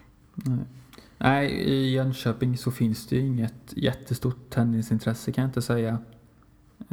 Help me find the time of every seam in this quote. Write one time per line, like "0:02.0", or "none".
none